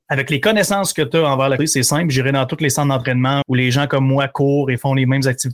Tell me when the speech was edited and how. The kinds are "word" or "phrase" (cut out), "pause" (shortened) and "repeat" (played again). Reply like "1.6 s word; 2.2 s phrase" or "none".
1.6 s word; 3.4 s word